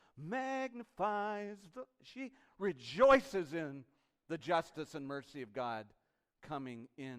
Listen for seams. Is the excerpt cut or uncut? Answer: uncut